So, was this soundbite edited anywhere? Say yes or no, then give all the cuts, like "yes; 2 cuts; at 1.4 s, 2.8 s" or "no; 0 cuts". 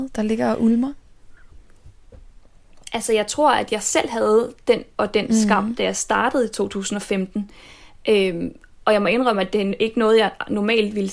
yes; 1 cut; at 4.9 s